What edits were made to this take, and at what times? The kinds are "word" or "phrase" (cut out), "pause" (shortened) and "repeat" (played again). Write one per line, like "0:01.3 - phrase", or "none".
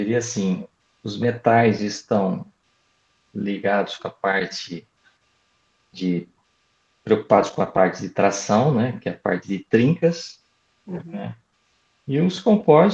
none